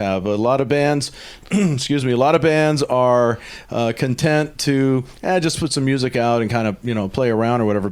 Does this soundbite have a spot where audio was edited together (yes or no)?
no